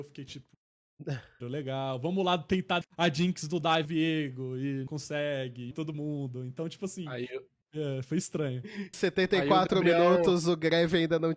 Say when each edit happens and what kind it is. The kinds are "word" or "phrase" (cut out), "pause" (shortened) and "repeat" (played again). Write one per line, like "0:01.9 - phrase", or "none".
0:01.4 - word
0:02.8 - word
0:03.8 - word
0:04.9 - word
0:05.7 - word
0:08.9 - word